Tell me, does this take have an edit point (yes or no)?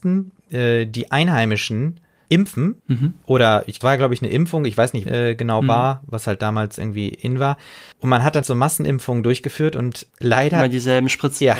yes